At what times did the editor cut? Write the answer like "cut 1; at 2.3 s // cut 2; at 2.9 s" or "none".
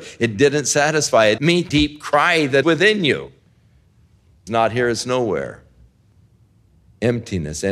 cut 1; at 1.4 s // cut 2; at 1.7 s // cut 3; at 2.6 s // cut 4; at 4.5 s